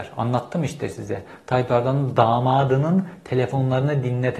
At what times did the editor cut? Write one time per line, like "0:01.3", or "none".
none